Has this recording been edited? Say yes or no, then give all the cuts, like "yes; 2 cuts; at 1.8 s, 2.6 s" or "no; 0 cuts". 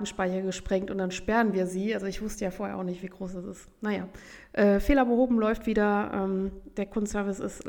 no; 0 cuts